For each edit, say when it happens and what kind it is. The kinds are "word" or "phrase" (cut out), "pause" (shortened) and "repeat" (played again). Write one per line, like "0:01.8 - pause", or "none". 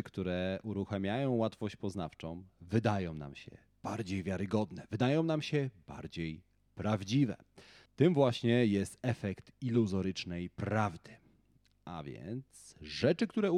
none